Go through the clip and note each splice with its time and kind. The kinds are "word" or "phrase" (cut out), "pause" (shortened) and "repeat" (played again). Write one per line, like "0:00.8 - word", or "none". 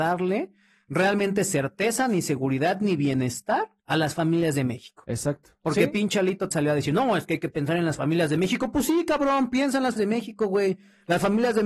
0:03.8 - pause
0:06.5 - word
0:10.0 - word